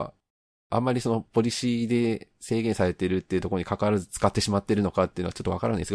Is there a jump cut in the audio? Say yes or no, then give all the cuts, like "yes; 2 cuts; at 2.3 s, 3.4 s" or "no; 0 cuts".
no; 0 cuts